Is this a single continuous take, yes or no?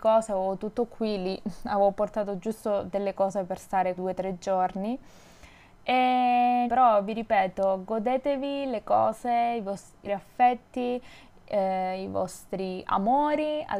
no